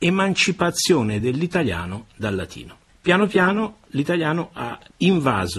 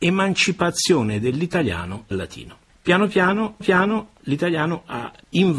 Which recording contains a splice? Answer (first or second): second